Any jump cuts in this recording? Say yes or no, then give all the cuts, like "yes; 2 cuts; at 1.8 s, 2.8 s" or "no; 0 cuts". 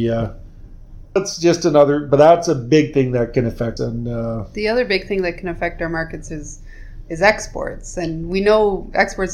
yes; 2 cuts; at 1.2 s, 3.8 s